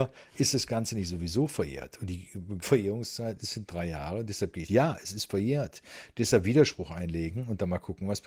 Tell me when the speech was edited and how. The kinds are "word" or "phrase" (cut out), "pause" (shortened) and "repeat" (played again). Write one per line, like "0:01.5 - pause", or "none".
0:02.6 - word
0:04.7 - phrase